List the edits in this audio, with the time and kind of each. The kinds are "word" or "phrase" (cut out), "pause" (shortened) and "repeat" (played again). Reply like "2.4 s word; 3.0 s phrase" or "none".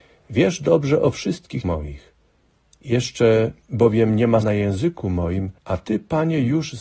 1.6 s word; 3.6 s pause; 4.4 s word; 5.6 s pause